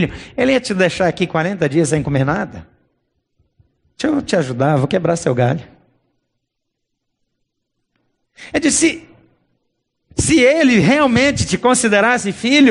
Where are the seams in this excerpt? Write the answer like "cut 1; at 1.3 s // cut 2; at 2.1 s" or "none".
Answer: none